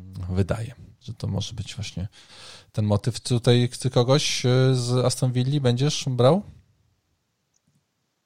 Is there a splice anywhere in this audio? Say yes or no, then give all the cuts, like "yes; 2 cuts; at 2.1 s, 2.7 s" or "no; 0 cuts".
no; 0 cuts